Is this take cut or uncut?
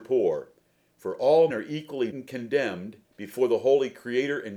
cut